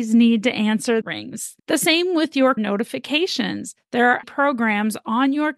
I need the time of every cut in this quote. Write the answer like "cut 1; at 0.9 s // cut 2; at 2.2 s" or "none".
cut 1; at 1.0 s // cut 2; at 1.6 s // cut 3; at 2.6 s // cut 4; at 4.2 s